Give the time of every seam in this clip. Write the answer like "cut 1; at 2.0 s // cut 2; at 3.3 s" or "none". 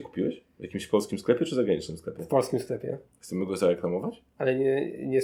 none